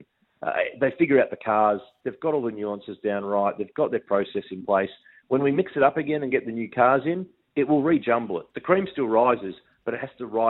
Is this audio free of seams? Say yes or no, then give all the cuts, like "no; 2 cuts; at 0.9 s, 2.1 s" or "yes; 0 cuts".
yes; 0 cuts